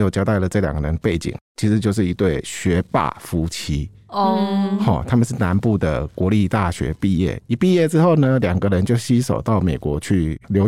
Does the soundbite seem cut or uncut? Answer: cut